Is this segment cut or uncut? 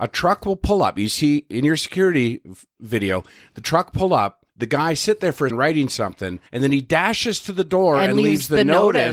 cut